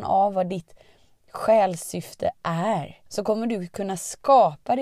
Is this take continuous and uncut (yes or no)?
no